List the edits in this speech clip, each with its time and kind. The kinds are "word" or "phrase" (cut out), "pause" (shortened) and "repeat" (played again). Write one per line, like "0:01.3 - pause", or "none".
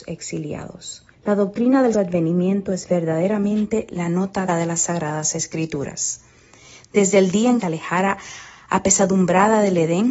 0:01.1 - pause
0:01.9 - word
0:04.5 - word
0:07.6 - phrase